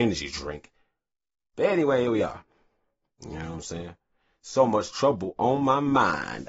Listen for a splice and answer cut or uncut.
uncut